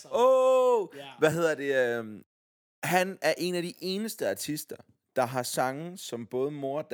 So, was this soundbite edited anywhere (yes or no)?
no